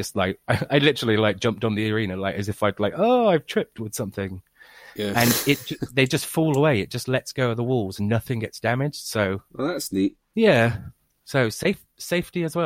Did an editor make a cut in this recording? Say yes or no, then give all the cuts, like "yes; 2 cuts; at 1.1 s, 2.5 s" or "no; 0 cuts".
no; 0 cuts